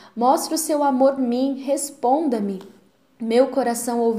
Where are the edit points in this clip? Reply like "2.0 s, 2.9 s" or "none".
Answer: 1.2 s